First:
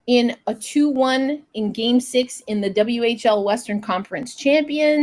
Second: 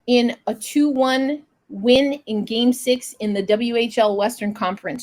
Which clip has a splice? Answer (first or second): first